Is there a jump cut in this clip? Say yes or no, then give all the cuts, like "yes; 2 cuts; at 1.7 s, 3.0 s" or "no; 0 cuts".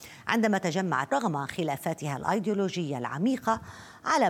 yes; 1 cut; at 1.1 s